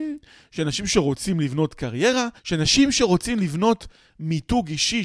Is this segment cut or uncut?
cut